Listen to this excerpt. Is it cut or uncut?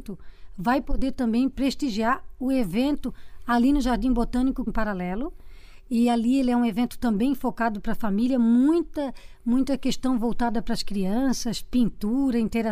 cut